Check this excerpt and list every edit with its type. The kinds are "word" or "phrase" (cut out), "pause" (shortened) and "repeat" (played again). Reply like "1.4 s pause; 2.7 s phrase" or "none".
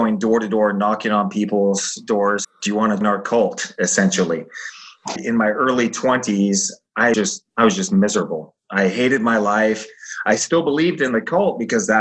2.4 s phrase; 3.0 s word; 5.2 s word; 7.1 s word